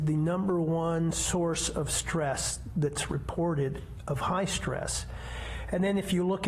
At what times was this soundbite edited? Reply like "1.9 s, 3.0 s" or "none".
none